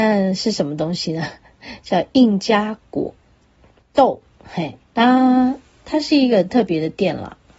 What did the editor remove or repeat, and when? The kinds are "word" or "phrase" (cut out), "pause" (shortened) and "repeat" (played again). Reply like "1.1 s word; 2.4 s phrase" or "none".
4.8 s pause